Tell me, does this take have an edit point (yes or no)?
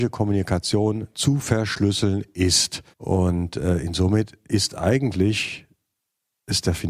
yes